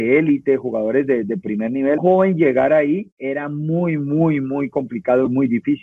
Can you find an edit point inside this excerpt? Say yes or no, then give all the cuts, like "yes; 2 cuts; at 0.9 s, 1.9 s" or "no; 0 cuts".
yes; 1 cut; at 2.0 s